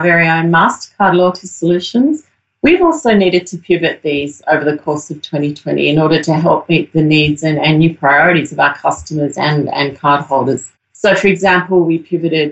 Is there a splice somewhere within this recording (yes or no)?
no